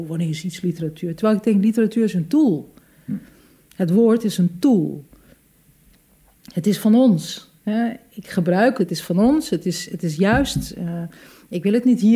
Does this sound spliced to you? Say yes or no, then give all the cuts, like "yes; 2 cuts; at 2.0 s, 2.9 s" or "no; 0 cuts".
yes; 2 cuts; at 7.6 s, 8.8 s